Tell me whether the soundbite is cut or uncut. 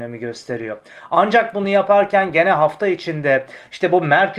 uncut